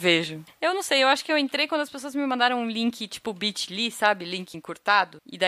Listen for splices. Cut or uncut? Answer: uncut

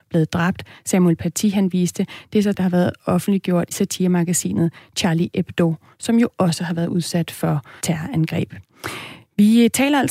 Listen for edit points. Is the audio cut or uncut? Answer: cut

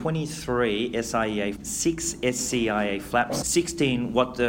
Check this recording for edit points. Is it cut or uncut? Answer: cut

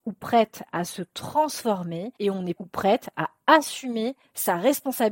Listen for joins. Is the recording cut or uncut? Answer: cut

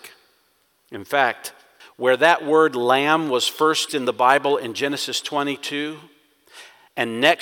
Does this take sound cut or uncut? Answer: cut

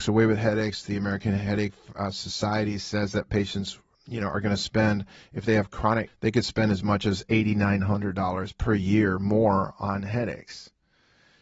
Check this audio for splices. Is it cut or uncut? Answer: cut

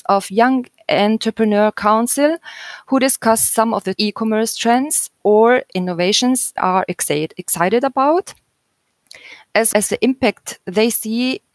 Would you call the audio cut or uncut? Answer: cut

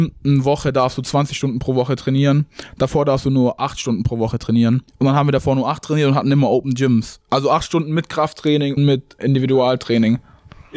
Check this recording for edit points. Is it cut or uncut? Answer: cut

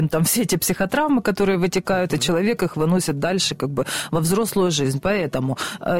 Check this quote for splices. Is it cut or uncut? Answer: uncut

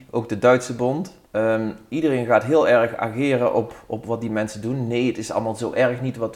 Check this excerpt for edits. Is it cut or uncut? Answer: cut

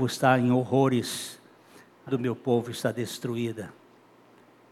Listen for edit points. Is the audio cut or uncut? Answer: cut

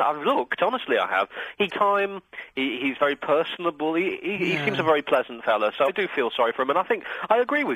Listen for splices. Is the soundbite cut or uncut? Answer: cut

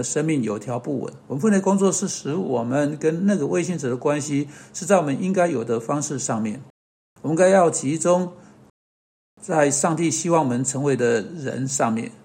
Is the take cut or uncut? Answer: cut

